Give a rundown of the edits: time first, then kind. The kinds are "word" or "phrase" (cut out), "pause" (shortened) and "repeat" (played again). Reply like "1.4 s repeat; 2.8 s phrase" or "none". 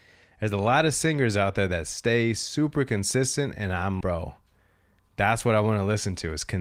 4.0 s word